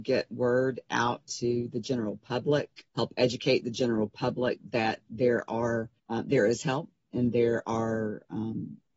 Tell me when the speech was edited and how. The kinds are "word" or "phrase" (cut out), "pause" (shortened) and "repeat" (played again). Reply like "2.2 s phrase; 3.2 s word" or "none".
2.9 s pause; 6.0 s pause